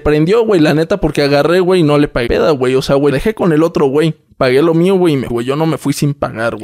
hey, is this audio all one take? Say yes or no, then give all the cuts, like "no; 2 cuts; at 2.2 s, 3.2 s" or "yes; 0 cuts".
no; 4 cuts; at 2.3 s, 3.1 s, 4.3 s, 5.3 s